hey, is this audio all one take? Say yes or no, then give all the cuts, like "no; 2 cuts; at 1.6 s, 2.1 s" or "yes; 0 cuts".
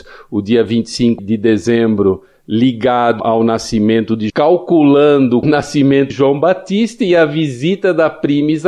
no; 5 cuts; at 1.2 s, 3.2 s, 4.3 s, 5.4 s, 6.1 s